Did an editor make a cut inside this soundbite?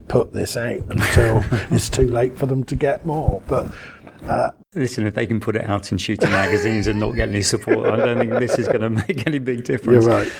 no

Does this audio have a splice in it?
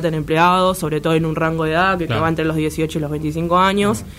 yes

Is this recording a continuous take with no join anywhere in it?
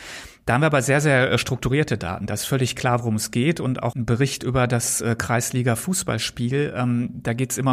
no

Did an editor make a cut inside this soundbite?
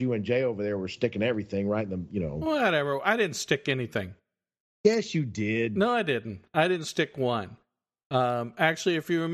no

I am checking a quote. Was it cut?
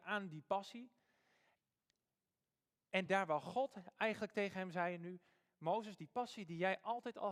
no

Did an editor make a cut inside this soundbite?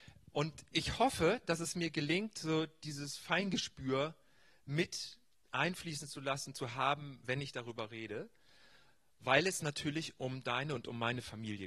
no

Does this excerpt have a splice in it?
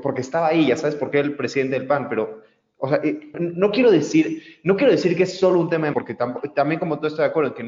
yes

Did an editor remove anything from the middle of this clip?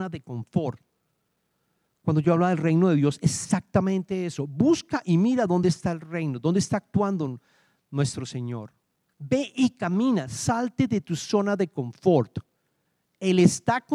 no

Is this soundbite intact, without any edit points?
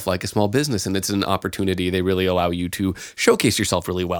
yes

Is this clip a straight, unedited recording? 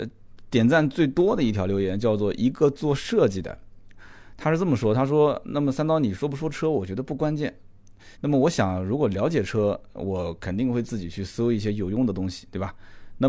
no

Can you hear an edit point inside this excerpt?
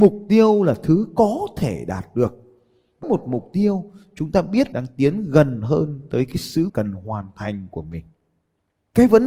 yes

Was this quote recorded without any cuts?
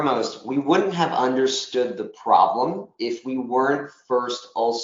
yes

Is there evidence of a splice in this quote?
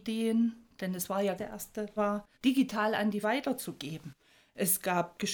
yes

